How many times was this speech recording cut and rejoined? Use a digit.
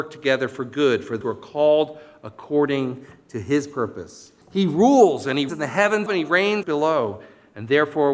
5